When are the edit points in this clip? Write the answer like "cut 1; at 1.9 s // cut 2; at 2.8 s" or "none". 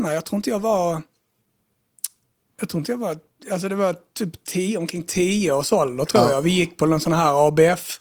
none